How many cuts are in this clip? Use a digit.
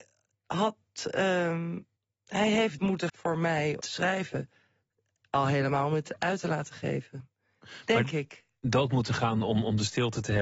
4